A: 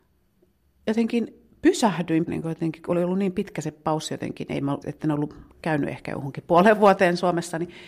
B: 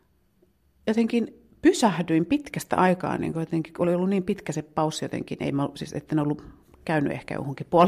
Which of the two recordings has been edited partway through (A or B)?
A